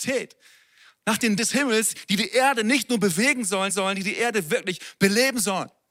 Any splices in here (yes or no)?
yes